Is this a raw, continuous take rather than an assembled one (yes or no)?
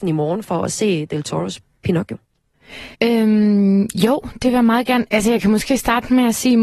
no